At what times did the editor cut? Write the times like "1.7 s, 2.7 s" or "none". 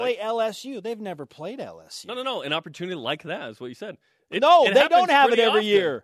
none